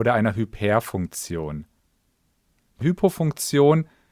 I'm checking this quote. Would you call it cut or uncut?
cut